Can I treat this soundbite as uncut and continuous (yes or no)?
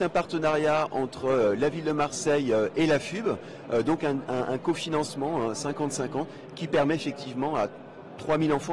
yes